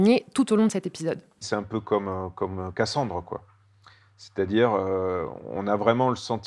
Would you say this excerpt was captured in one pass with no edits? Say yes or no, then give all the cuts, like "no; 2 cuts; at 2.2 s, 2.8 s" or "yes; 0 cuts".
yes; 0 cuts